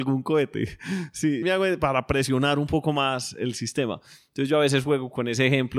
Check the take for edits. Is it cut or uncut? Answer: cut